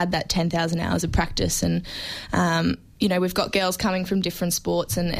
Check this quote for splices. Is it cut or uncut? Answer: uncut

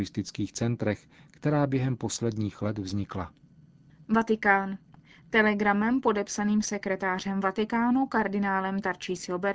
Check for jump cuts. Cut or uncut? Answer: cut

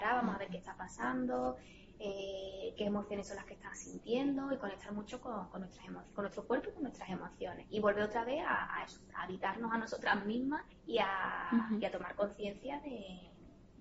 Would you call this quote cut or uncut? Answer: cut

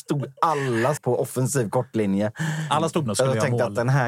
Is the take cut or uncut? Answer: cut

